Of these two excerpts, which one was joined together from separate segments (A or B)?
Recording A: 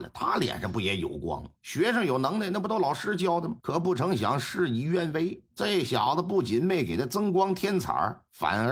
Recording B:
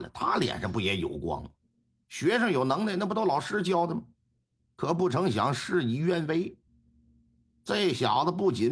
A